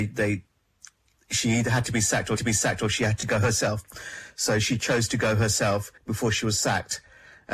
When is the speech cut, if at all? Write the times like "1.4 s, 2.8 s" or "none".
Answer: 2.4 s, 6.0 s